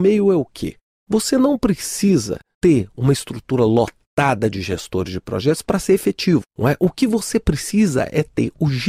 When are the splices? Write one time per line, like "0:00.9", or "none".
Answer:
0:06.5